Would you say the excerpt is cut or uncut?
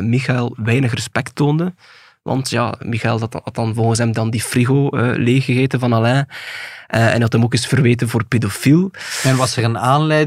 uncut